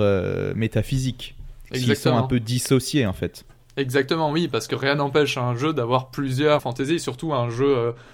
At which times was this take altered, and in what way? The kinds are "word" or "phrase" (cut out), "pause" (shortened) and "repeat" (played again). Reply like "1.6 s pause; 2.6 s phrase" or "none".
6.6 s word